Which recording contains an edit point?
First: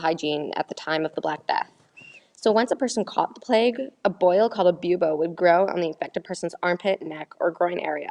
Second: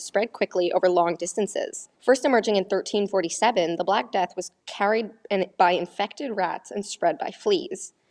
second; 2 cuts; at 1.9 s, 4.6 s

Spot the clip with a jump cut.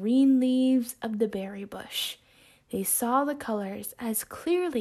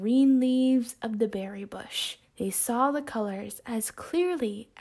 second; 1 cut; at 2.2 s

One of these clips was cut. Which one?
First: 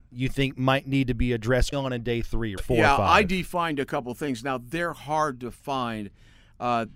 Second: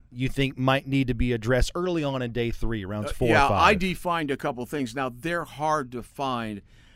first; 2 cuts; at 1.7 s, 2.6 s

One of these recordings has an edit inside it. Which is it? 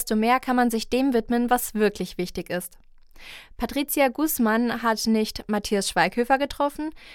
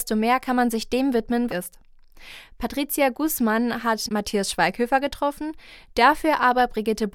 second; 2 cuts; at 1.5 s, 4.1 s

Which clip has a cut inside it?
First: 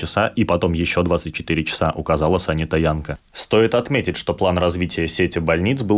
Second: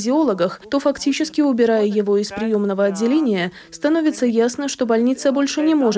first; 1 cut; at 3.3 s

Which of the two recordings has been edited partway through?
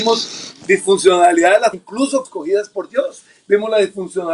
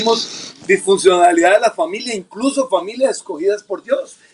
first; 2 cuts; at 1.7 s, 2.2 s

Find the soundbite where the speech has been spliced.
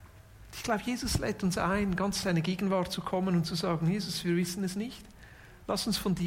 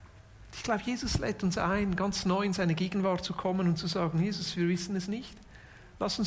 first; 1 cut; at 2.2 s

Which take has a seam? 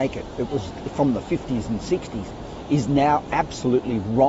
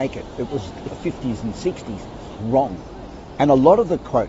second; 2 cuts; at 0.9 s, 2.4 s

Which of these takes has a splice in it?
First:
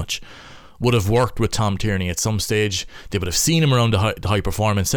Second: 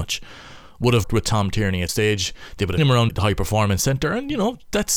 second; 4 cuts; at 1.0 s, 1.9 s, 2.8 s, 3.1 s

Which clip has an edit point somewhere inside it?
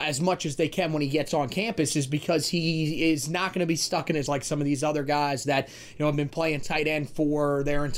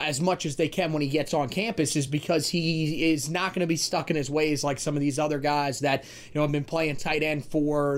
first; 1 cut; at 4.3 s

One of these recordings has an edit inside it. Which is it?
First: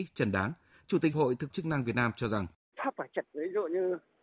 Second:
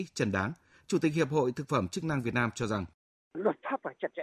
first; 4 cuts; at 1.1 s, 1.5 s, 2.7 s, 3.2 s

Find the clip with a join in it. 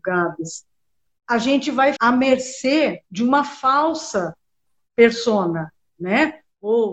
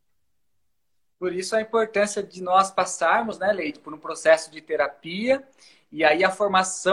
first; 3 cuts; at 2.0 s, 3.1 s, 5.9 s

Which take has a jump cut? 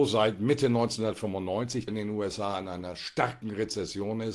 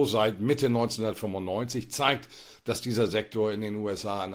first; 1 cut; at 1.9 s

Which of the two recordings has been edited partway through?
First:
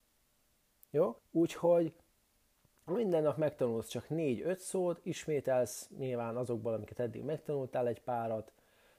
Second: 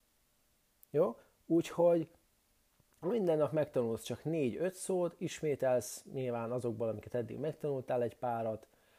first; 1 cut; at 1.2 s

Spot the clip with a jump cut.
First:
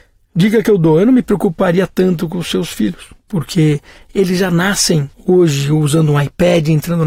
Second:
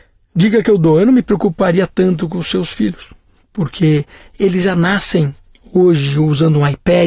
first; 2 cuts; at 3.2 s, 5.1 s

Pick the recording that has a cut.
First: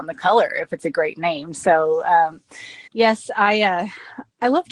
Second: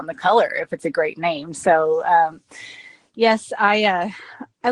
first; 1 cut; at 2.9 s

